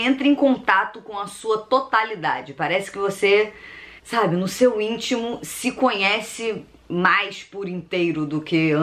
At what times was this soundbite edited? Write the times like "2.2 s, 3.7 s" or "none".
4.0 s